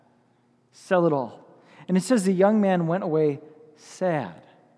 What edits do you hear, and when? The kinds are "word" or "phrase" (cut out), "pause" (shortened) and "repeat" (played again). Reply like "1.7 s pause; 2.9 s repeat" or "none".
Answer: none